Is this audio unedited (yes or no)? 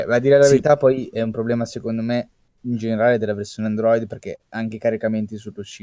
yes